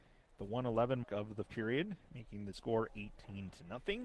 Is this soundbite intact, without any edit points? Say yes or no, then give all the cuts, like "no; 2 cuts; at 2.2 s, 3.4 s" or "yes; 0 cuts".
no; 3 cuts; at 1.0 s, 1.5 s, 2.5 s